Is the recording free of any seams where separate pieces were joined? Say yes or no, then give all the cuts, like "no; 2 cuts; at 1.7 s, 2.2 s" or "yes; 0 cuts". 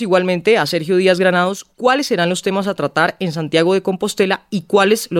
yes; 0 cuts